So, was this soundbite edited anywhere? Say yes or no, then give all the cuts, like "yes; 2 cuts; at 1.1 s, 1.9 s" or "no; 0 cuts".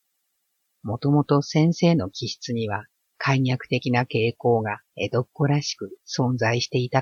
yes; 2 cuts; at 3.1 s, 4.9 s